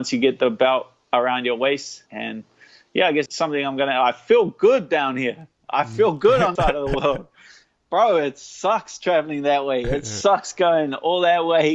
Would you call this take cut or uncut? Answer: cut